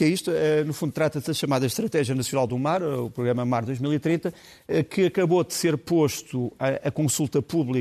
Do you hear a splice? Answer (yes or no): no